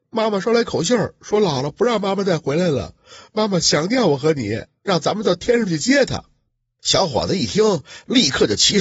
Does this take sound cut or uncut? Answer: uncut